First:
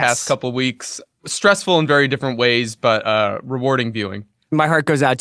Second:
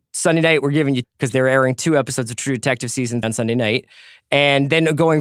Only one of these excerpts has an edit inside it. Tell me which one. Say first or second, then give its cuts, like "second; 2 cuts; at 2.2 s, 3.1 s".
second; 2 cuts; at 1.0 s, 3.2 s